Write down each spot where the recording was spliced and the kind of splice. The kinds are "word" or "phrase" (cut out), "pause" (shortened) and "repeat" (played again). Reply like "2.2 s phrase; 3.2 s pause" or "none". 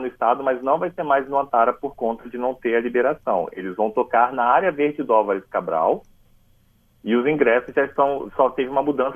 none